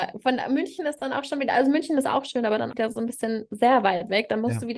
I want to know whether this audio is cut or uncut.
cut